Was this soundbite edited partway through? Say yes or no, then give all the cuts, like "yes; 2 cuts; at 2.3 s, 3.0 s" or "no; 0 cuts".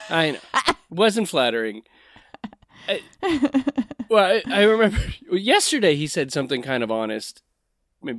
no; 0 cuts